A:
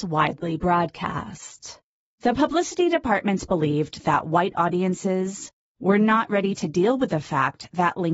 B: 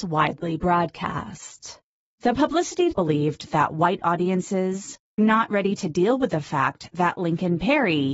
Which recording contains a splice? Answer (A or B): B